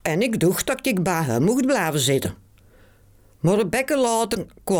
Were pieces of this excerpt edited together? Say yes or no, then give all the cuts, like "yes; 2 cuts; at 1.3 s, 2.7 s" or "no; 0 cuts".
no; 0 cuts